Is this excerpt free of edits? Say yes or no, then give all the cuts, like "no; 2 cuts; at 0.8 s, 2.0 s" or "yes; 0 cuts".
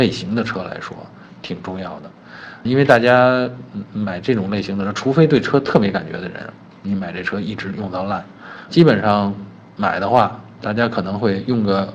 no; 4 cuts; at 2.6 s, 8.7 s, 9.8 s, 10.6 s